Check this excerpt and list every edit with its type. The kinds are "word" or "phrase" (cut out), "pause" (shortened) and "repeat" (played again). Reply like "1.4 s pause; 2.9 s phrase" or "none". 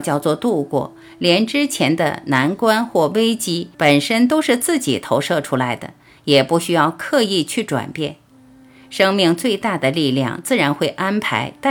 3.7 s pause